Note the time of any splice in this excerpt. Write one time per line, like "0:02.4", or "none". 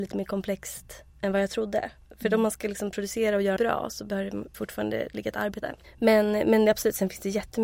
0:01.1
0:03.6
0:04.5
0:05.6